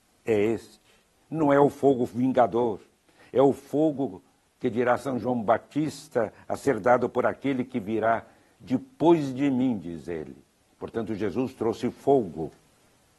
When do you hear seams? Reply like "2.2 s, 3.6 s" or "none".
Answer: none